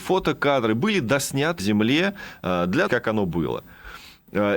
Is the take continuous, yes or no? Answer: no